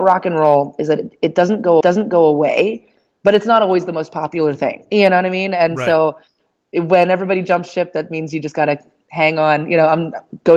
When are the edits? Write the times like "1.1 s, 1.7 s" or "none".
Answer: 1.8 s